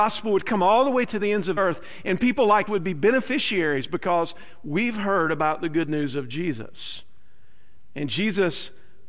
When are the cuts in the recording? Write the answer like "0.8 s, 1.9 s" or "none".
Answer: 1.6 s, 2.7 s